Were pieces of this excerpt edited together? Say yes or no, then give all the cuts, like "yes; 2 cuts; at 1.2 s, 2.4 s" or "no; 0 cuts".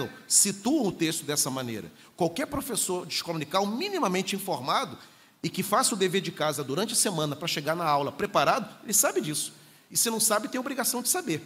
no; 0 cuts